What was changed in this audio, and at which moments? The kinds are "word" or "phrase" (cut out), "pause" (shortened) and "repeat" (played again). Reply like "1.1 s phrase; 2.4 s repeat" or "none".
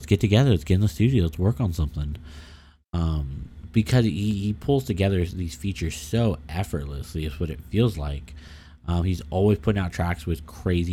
none